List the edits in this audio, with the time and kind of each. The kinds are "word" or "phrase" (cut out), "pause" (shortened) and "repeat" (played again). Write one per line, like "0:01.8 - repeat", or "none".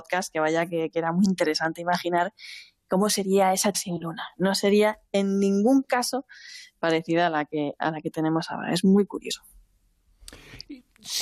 0:03.7 - word